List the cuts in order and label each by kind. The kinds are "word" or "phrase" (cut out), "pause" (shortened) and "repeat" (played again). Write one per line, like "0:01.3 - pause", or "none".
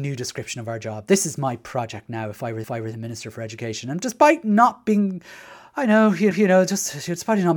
0:02.6 - repeat
0:06.3 - repeat

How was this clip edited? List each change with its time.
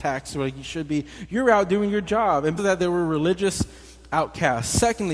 0:02.6 - word

